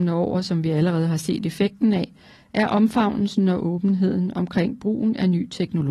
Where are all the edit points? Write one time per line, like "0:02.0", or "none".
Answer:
none